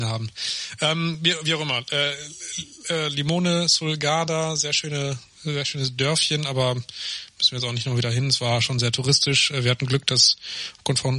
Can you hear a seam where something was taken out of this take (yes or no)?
no